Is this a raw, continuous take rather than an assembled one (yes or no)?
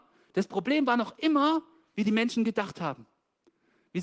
yes